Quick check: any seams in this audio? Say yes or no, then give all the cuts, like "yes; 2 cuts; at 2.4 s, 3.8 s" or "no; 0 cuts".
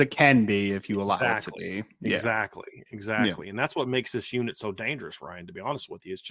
no; 0 cuts